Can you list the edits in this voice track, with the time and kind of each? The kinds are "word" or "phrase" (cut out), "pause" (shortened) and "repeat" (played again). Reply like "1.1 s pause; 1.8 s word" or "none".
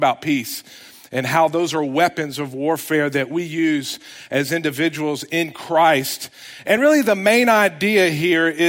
none